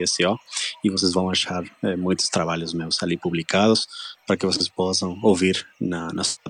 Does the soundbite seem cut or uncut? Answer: uncut